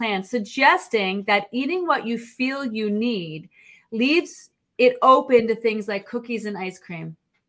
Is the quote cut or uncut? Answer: uncut